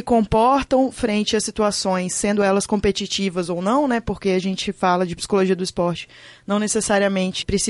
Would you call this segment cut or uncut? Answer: uncut